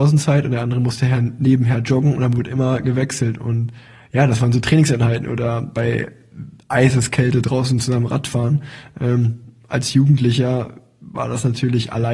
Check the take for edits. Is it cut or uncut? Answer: uncut